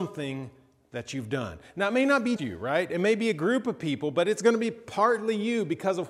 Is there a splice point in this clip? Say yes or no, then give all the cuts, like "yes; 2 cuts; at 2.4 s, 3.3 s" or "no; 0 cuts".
yes; 1 cut; at 2.4 s